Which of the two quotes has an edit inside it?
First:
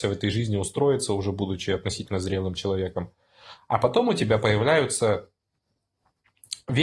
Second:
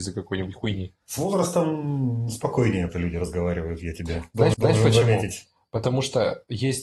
second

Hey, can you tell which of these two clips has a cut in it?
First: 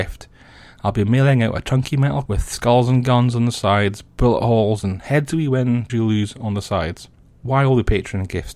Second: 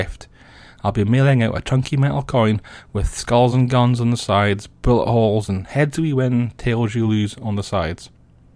first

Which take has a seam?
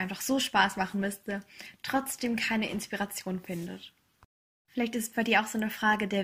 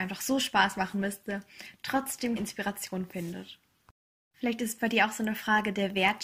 second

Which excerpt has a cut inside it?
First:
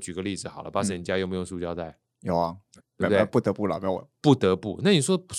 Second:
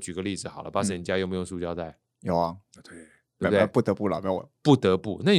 first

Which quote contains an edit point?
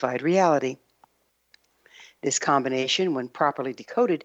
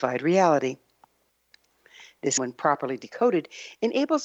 second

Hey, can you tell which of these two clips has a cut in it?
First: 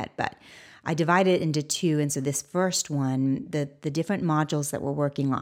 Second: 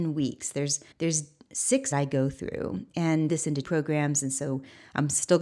second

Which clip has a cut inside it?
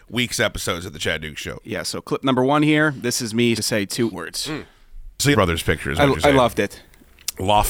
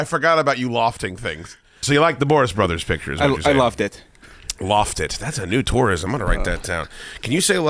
first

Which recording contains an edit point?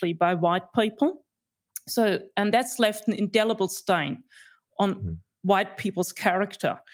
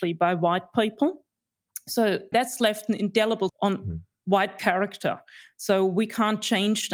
second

